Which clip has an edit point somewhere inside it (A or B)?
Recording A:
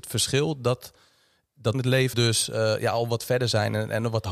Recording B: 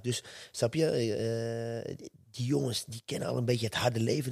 A